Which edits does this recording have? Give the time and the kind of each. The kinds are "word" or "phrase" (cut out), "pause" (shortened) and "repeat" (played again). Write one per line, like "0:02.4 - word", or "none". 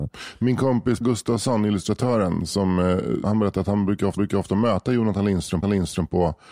0:01.0 - word
0:03.2 - word
0:04.2 - repeat
0:05.6 - repeat